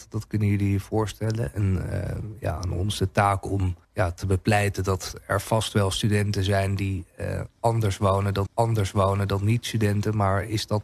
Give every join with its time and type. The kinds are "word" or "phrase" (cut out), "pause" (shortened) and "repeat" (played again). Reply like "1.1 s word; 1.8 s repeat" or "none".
3.8 s pause; 8.5 s repeat